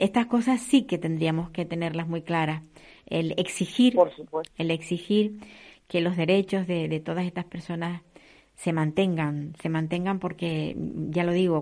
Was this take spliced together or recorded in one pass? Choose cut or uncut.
uncut